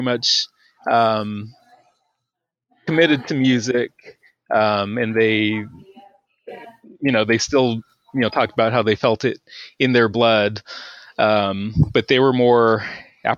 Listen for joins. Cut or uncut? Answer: uncut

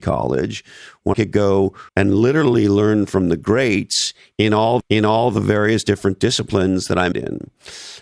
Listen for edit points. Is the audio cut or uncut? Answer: cut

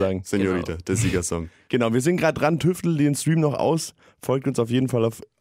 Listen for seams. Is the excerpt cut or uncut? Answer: uncut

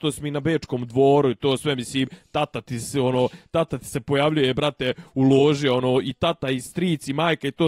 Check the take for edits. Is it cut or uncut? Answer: uncut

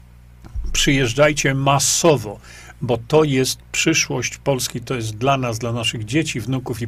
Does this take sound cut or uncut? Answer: uncut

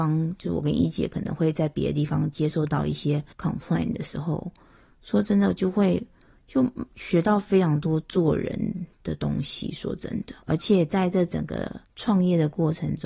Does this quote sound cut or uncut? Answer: cut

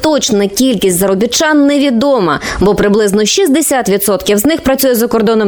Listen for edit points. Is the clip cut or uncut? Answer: uncut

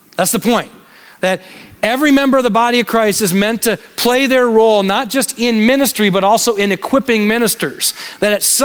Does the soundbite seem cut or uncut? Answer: uncut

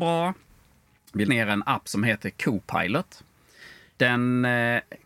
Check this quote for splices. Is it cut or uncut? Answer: cut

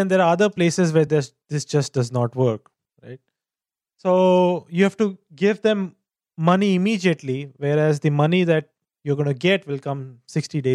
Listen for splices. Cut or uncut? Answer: uncut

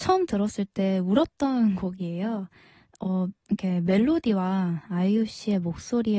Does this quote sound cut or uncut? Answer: cut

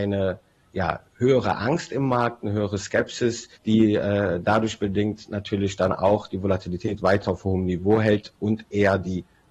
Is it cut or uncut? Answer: cut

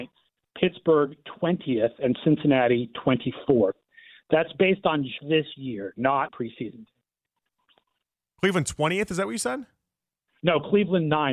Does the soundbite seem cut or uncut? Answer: cut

